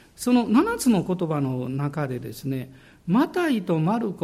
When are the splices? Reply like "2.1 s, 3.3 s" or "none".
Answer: none

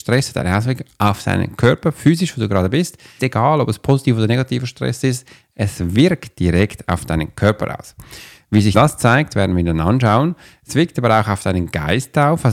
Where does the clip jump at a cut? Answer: 3.2 s, 8.7 s

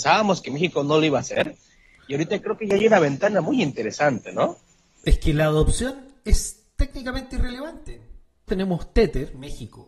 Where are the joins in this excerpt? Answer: 8.5 s

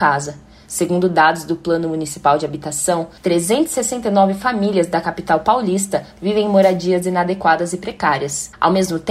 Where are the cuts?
3.2 s

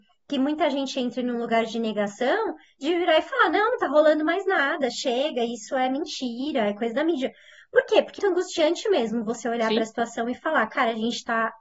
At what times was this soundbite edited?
8.2 s

